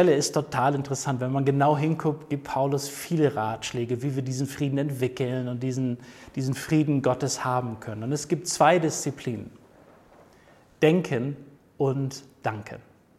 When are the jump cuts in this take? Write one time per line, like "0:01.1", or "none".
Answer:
none